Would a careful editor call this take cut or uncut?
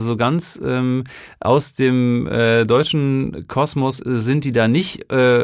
uncut